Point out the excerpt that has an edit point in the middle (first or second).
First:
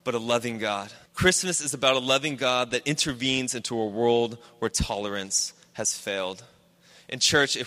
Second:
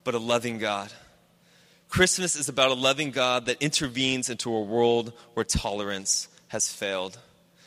first